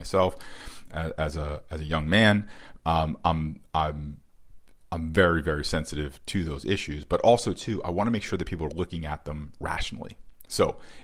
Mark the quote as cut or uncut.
uncut